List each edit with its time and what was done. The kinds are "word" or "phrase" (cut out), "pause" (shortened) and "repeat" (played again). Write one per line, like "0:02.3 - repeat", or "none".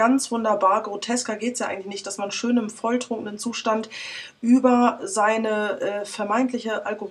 none